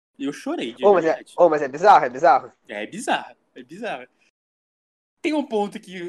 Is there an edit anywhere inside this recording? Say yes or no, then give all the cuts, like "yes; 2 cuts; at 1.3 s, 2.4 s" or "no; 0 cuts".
no; 0 cuts